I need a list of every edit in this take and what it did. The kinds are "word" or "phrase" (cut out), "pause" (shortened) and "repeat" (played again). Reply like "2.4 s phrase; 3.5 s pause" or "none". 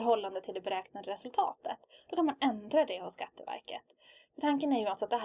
none